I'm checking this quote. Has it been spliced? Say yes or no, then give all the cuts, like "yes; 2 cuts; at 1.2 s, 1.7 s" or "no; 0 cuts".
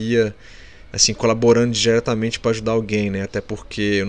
no; 0 cuts